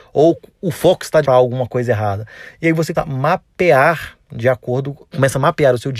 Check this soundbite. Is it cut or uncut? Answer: cut